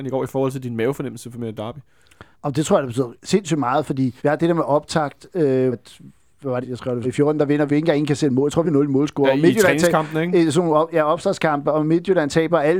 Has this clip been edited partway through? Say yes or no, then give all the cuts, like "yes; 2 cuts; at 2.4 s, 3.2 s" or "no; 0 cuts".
yes; 8 cuts; at 2.3 s, 3.2 s, 4.2 s, 5.7 s, 6.6 s, 7.0 s, 7.7 s, 8.6 s